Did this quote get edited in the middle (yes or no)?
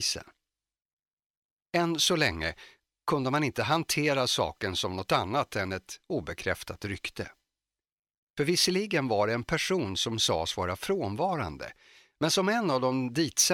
no